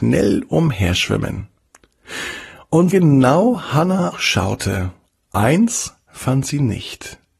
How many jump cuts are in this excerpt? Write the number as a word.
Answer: two